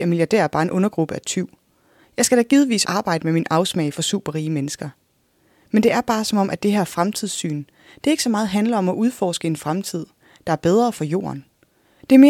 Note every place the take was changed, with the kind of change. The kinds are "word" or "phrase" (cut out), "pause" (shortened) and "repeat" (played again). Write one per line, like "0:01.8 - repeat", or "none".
0:02.8 - word